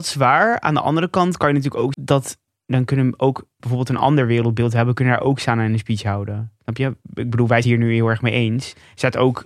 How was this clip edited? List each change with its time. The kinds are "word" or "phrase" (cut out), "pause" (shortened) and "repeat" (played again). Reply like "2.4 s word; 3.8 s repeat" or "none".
1.9 s word; 3.6 s phrase; 7.6 s phrase